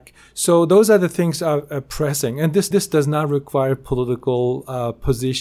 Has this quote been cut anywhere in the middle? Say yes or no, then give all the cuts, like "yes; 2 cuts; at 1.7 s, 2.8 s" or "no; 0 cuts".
yes; 1 cut; at 2.7 s